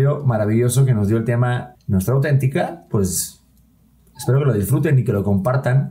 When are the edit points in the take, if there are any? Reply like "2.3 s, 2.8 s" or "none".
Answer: 1.7 s